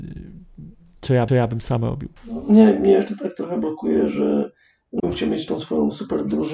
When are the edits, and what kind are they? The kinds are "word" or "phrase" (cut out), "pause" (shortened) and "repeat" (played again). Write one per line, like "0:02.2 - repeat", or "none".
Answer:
0:01.3 - repeat
0:02.2 - pause
0:05.0 - word